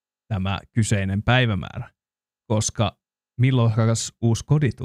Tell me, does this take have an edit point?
no; 0 cuts

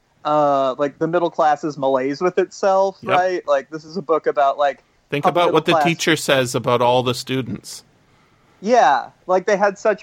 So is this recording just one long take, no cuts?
yes; 0 cuts

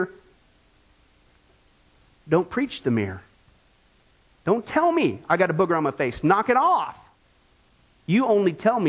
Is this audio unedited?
yes; 0 cuts

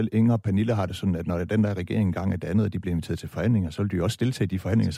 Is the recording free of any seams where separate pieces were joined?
yes; 0 cuts

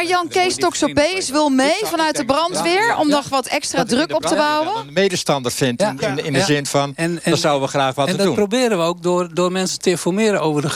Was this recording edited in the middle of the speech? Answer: no; 0 cuts

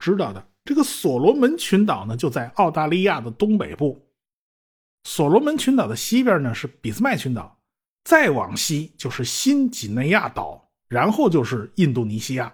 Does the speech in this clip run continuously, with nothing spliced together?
yes; 0 cuts

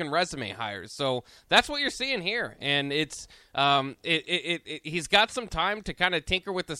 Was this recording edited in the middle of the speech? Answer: no; 0 cuts

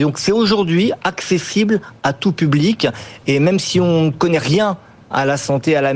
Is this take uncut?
yes; 0 cuts

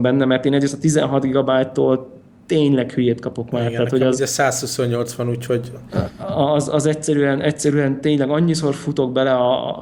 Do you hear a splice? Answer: no; 0 cuts

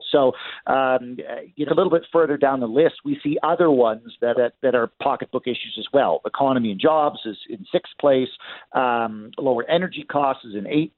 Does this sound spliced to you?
yes; 2 cuts; at 1.7 s, 4.3 s

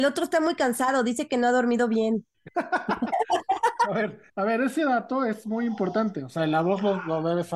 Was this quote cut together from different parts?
yes; 1 cut; at 4.3 s

